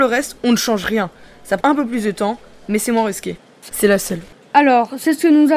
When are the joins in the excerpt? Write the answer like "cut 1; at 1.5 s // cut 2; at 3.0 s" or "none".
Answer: cut 1; at 1.6 s // cut 2; at 3.7 s